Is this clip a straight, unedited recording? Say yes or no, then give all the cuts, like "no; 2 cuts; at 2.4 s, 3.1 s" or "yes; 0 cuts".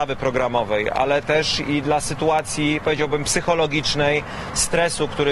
yes; 0 cuts